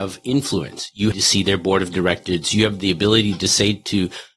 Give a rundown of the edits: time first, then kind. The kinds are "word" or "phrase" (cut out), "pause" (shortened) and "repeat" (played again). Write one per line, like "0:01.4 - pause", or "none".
0:01.1 - phrase

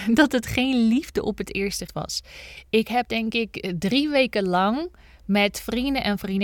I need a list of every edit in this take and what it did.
0:01.9 - word

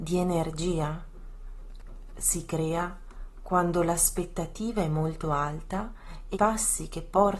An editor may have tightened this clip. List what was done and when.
0:06.3 - word

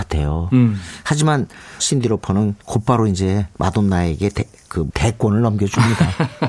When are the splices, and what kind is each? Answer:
0:01.8 - word
0:02.6 - pause
0:04.9 - word

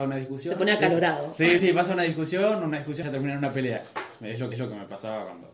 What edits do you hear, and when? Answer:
0:01.6 - word
0:03.0 - phrase
0:04.2 - pause
0:04.5 - repeat

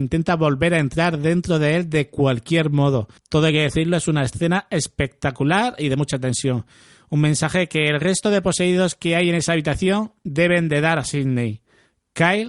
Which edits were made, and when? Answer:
0:03.2 - pause

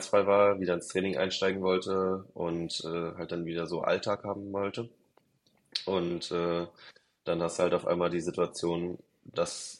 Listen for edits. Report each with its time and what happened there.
none

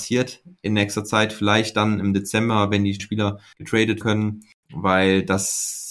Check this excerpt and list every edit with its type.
0:03.0 - word
0:04.0 - word

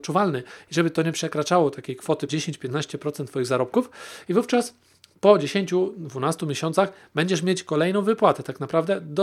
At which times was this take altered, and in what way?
0:02.3 - word

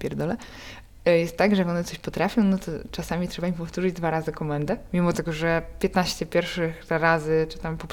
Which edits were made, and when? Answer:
0:01.0 - word

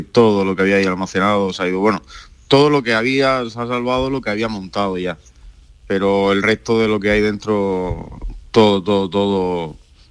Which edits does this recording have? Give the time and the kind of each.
none

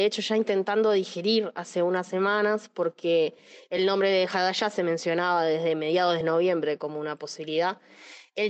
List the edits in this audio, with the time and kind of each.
none

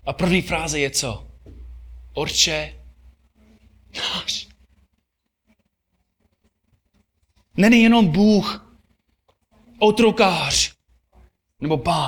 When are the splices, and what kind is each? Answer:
none

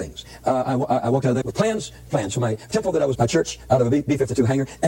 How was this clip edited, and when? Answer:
0:01.4 - word
0:02.1 - word
0:02.7 - word
0:03.1 - word

